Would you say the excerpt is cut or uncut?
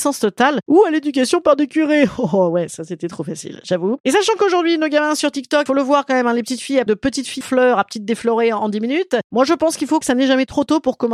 cut